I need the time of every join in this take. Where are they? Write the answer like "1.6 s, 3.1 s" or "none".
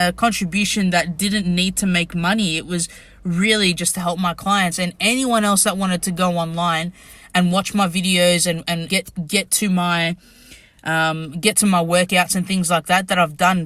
8.9 s

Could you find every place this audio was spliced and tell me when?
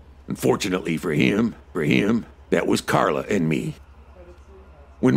1.7 s

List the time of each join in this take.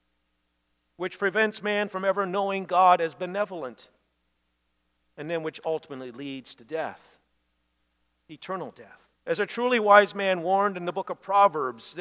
9.2 s

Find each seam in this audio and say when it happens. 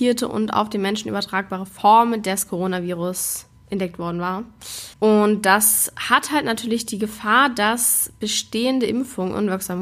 4.9 s

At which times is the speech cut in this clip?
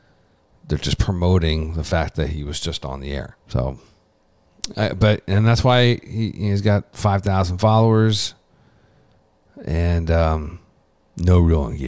3.4 s, 10.8 s

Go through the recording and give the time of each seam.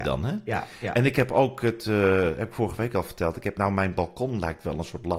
3.5 s

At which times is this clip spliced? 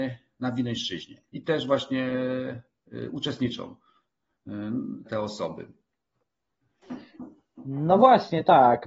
1.3 s, 5.1 s

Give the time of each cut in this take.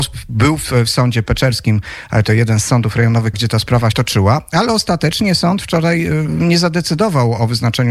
2.2 s, 3.3 s, 3.9 s

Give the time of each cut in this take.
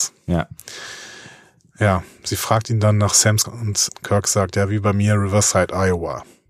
3.4 s, 3.9 s

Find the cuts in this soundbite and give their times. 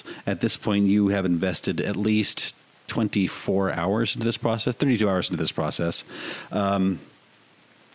none

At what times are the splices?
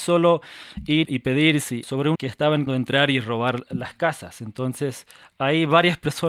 1.0 s, 1.8 s, 2.1 s, 2.7 s

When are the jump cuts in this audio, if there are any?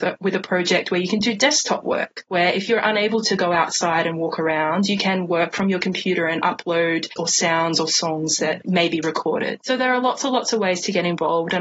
7.2 s, 8.6 s

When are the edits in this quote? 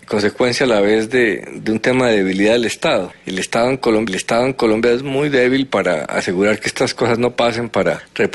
4.1 s

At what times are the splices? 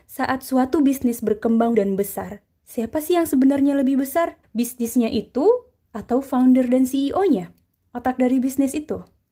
1.7 s, 4.4 s

